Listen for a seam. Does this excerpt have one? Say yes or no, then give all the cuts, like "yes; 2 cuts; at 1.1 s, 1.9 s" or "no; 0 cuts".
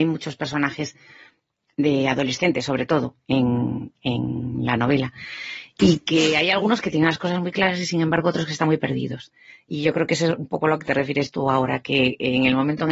no; 0 cuts